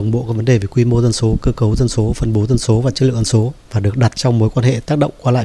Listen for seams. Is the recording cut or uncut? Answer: uncut